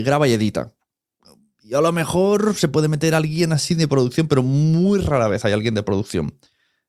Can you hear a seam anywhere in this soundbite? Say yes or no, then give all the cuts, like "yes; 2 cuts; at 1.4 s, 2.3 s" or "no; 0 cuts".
no; 0 cuts